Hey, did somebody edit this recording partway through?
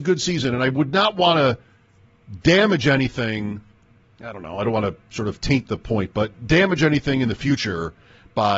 no; 0 cuts

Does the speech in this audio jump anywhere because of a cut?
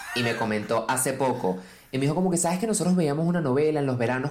no; 0 cuts

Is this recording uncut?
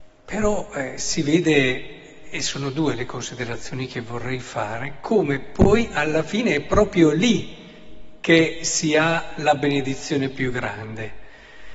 yes; 0 cuts

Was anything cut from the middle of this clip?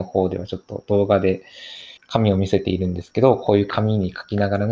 yes; 1 cut; at 2.0 s

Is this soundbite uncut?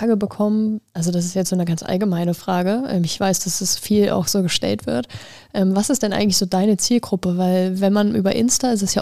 yes; 0 cuts

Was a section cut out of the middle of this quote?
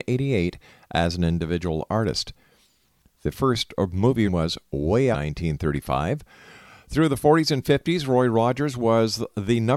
yes; 2 cuts; at 4.3 s, 5.1 s

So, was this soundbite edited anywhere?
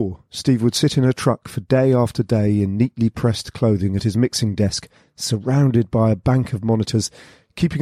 no; 0 cuts

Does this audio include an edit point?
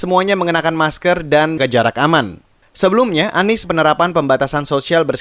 yes; 2 cuts; at 1.6 s, 3.6 s

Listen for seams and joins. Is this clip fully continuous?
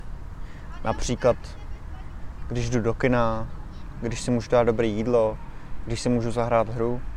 yes; 0 cuts

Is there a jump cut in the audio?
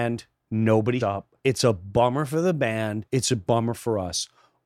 yes; 3 cuts; at 1.0 s, 1.4 s, 3.1 s

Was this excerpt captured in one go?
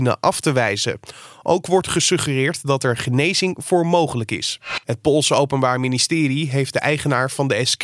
no; 1 cut; at 4.8 s

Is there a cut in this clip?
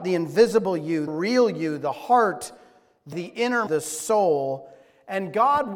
yes; 3 cuts; at 1.1 s, 3.1 s, 3.7 s

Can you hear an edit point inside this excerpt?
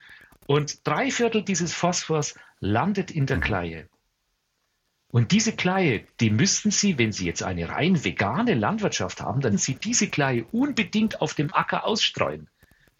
yes; 1 cut; at 9.5 s

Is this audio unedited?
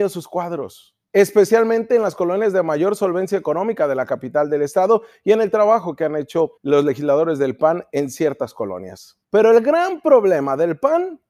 no; 3 cuts; at 1.0 s, 6.6 s, 9.2 s

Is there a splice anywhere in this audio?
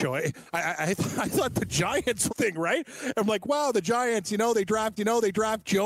yes; 2 cuts; at 2.3 s, 5.0 s

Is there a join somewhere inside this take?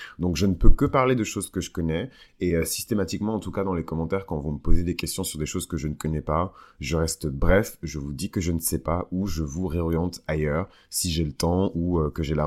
no; 0 cuts

